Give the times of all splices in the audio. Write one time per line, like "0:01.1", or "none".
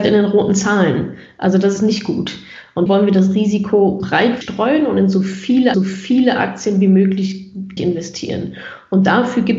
0:02.9
0:04.0
0:04.4
0:05.7
0:07.8

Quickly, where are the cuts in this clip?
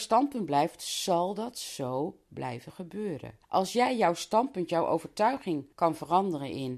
0:03.4
0:05.7

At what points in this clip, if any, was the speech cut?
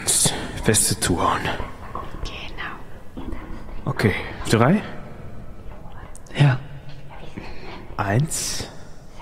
0:04.5

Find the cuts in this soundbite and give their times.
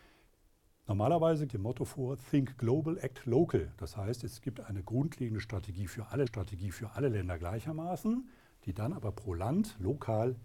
0:01.5
0:06.3

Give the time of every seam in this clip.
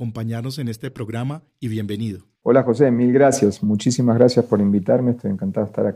0:02.3

